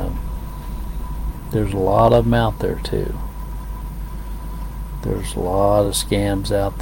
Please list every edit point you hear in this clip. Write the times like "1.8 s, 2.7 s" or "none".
none